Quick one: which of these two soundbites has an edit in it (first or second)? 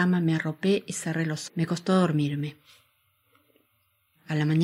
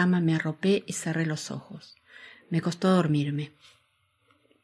first